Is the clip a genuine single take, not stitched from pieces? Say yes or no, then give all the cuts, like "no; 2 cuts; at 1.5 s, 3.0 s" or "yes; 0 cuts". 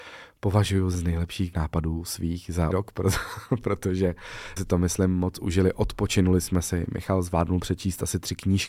no; 4 cuts; at 0.9 s, 1.5 s, 2.7 s, 4.6 s